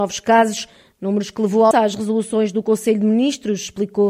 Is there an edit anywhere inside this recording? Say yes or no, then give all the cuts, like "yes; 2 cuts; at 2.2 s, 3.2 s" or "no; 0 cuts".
yes; 1 cut; at 1.7 s